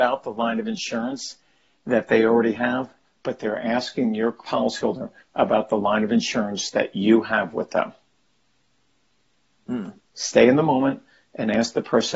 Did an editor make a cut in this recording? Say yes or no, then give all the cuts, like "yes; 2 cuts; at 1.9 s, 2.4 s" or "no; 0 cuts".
no; 0 cuts